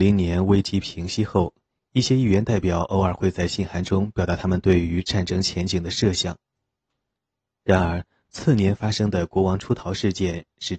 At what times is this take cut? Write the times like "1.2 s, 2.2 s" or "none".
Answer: none